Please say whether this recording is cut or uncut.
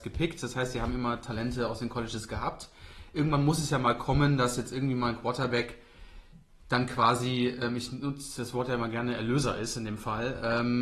uncut